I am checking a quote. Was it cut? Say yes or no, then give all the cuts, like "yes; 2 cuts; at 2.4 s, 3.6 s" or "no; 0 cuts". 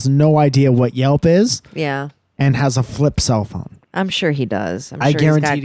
no; 0 cuts